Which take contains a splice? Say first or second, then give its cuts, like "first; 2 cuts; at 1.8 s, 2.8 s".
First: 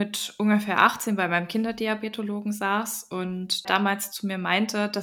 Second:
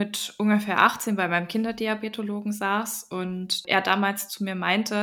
first; 1 cut; at 3.7 s